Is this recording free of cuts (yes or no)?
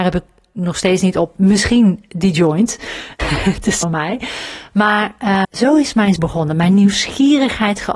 no